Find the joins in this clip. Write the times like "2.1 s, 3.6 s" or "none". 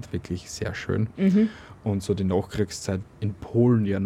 3.0 s